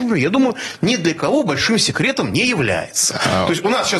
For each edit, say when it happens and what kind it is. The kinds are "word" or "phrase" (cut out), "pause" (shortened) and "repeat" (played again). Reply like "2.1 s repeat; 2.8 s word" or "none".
none